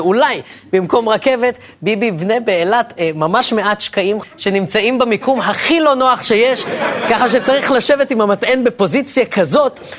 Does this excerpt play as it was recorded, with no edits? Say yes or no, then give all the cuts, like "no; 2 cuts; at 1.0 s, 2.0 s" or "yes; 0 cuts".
no; 1 cut; at 4.2 s